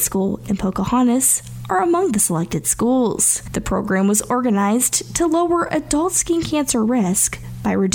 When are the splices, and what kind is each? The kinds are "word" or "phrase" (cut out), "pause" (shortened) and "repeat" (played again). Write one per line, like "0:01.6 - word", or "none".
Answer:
none